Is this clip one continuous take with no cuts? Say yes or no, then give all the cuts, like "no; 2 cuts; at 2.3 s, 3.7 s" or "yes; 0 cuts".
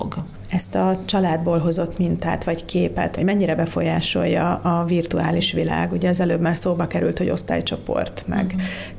yes; 0 cuts